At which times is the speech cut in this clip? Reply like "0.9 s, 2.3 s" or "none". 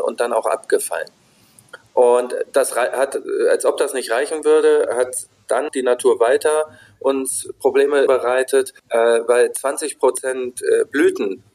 5.7 s, 8.1 s, 8.8 s

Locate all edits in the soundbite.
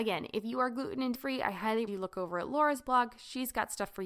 1.1 s, 1.9 s

